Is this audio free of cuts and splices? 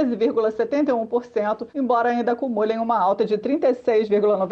no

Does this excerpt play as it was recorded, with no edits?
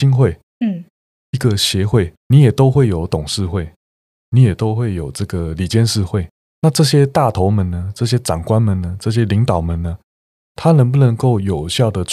yes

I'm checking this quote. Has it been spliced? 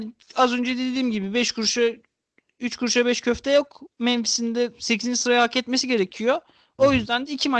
no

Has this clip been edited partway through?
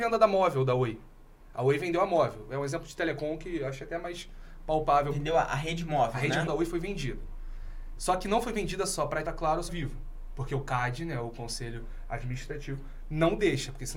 yes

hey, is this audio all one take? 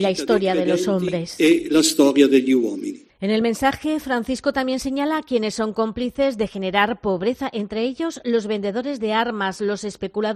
yes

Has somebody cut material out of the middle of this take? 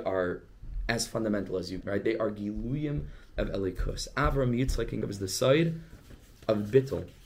yes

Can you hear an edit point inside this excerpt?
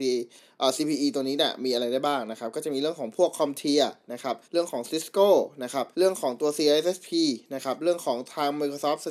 yes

